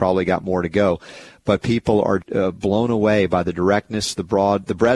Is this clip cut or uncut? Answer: cut